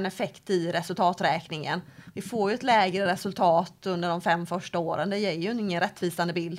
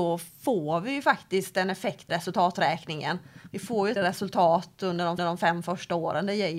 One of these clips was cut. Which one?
second; 3 cuts; at 2.1 s, 4.0 s, 5.2 s

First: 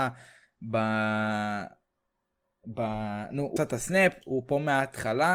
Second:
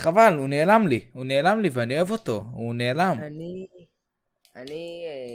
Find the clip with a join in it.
first; 1 cut; at 3.6 s

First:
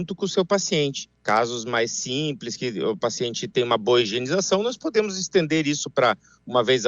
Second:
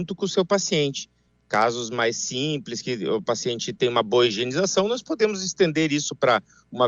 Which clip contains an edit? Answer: first; 1 cut; at 1.1 s

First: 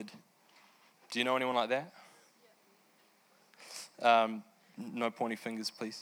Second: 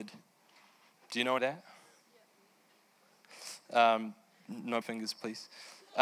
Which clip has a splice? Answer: second; 2 cuts; at 1.4 s, 4.8 s

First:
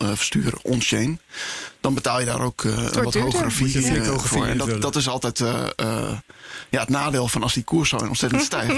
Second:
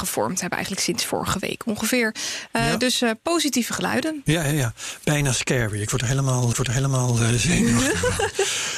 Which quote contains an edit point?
second; 1 cut; at 6.5 s

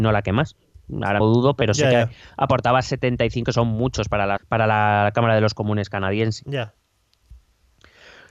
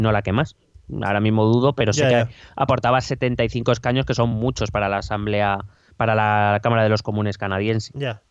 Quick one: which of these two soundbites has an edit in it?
first; 3 cuts; at 1.2 s, 3.4 s, 4.4 s

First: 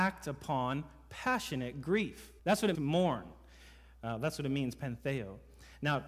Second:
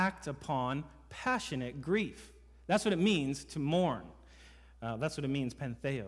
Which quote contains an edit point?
first; 2 cuts; at 2.4 s, 2.7 s

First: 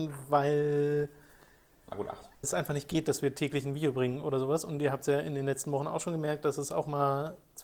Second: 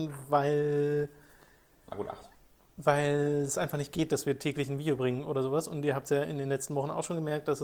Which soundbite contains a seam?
first; 1 cut; at 2.4 s

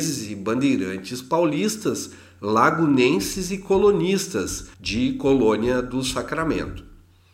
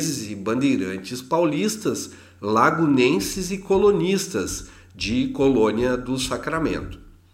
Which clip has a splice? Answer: first; 1 cut; at 4.7 s

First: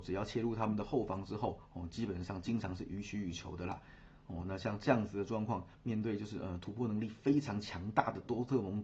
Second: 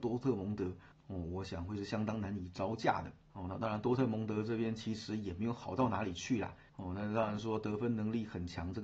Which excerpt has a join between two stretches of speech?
second; 2 cuts; at 3.2 s, 6.7 s

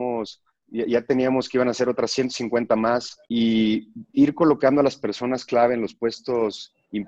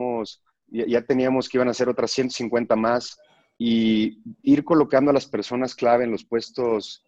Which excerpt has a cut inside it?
first; 1 cut; at 3.2 s

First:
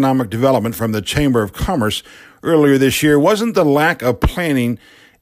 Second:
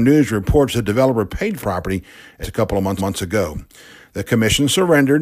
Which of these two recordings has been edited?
second; 3 cuts; at 1.6 s, 2.4 s, 3.0 s

